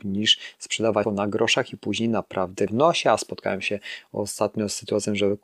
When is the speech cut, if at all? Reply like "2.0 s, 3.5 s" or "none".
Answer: 1.0 s, 2.7 s